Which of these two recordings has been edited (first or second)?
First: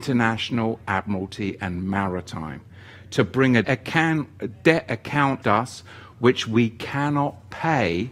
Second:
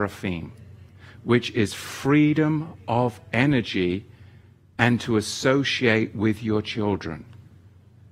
first